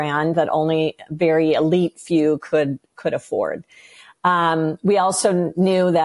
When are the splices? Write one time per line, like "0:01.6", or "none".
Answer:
none

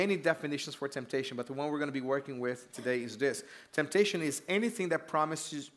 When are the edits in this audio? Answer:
none

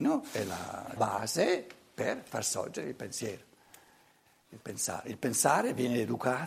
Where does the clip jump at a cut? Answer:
0:01.0

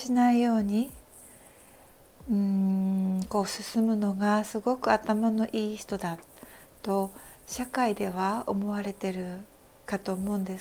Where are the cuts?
none

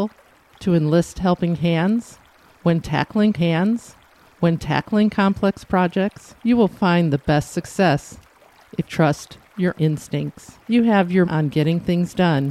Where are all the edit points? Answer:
0:03.3
0:06.4
0:08.8
0:09.7
0:10.6
0:11.2

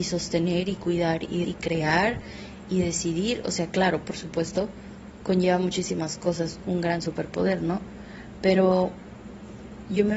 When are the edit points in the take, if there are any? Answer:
0:01.4

